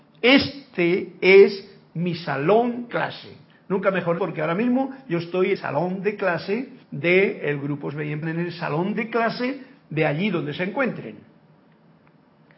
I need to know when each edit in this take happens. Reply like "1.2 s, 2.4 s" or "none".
2.9 s, 4.2 s, 5.6 s, 6.8 s, 7.9 s, 8.2 s